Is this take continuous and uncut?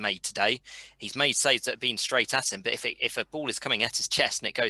yes; 0 cuts

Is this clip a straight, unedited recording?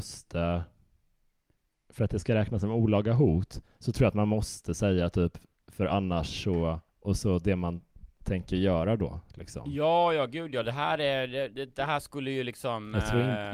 yes; 0 cuts

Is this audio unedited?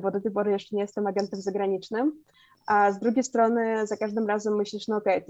yes; 0 cuts

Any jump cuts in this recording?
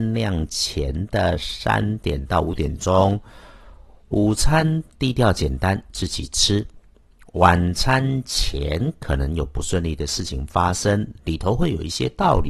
no; 0 cuts

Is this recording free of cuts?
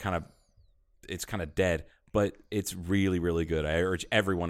yes; 0 cuts

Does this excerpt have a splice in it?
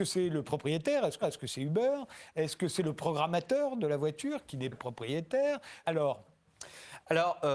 yes; 3 cuts; at 1.2 s, 4.7 s, 5.8 s

